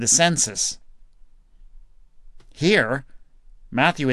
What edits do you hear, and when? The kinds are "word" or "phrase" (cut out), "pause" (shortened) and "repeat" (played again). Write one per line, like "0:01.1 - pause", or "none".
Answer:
none